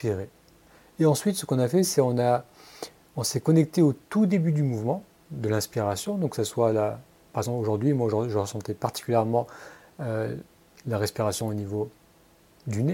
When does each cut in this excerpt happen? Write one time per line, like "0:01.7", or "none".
none